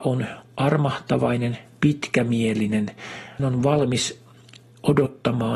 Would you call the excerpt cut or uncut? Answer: cut